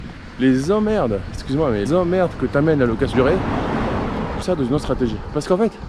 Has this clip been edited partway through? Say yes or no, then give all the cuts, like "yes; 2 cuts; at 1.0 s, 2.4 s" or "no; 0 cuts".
yes; 3 cuts; at 1.9 s, 3.1 s, 4.4 s